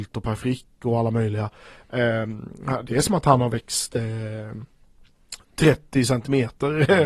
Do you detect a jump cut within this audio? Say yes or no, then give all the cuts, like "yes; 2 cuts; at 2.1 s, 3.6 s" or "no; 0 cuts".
no; 0 cuts